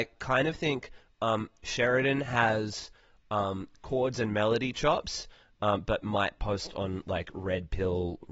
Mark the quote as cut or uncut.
uncut